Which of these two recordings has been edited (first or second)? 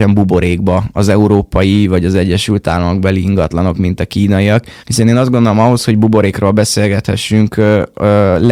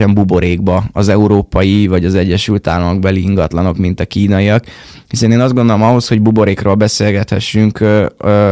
first